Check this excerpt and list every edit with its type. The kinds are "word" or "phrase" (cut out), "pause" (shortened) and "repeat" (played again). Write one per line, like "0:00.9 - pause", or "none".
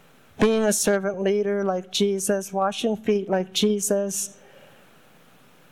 none